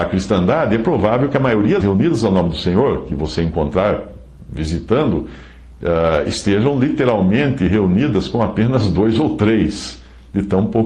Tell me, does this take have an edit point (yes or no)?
yes